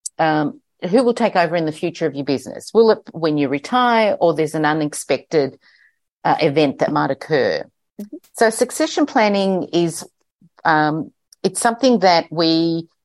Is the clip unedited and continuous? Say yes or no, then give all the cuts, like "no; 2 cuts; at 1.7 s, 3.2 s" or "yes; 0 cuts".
yes; 0 cuts